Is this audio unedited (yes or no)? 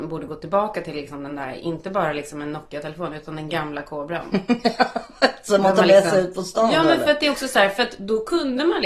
yes